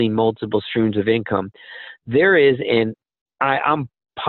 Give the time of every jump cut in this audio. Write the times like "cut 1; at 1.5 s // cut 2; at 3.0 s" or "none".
none